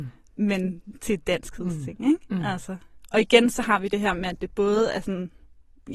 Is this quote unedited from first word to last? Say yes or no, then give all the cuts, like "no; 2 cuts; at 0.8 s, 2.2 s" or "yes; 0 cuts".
yes; 0 cuts